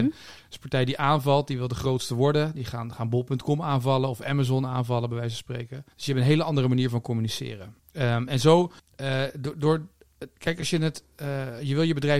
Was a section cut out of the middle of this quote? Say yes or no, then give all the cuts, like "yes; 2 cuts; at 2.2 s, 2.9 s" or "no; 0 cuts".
yes; 3 cuts; at 5.9 s, 7.8 s, 8.8 s